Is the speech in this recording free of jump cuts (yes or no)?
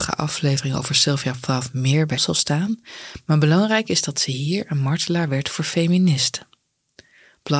no